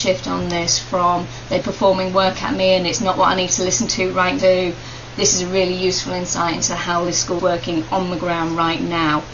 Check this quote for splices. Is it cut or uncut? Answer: cut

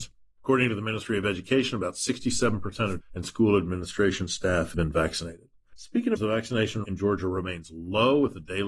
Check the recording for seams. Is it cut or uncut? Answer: cut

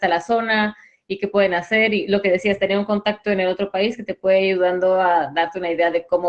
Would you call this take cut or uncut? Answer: uncut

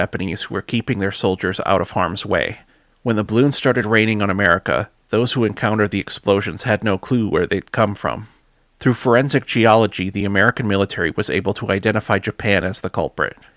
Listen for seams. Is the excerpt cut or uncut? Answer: uncut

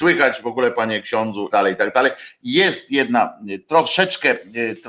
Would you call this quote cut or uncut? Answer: cut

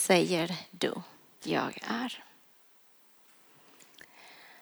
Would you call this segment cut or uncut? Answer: cut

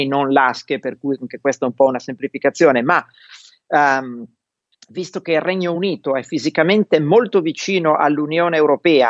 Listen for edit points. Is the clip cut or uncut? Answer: uncut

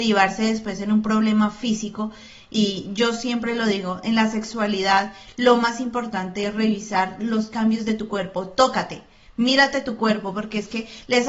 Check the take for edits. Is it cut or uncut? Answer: uncut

